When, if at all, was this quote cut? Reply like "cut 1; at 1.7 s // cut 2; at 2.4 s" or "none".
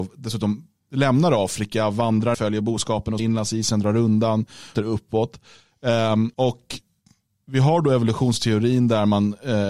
cut 1; at 2.3 s // cut 2; at 3.2 s // cut 3; at 4.7 s // cut 4; at 6.3 s